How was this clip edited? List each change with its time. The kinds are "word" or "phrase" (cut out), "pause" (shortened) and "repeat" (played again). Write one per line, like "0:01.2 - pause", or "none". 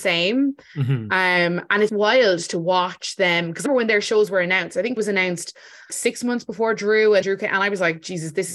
0:01.9 - word
0:03.7 - word
0:05.0 - word
0:05.9 - word
0:07.2 - word